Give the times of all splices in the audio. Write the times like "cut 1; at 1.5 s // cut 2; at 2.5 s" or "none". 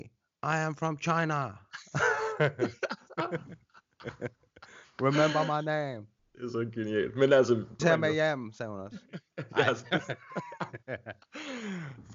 cut 1; at 7.8 s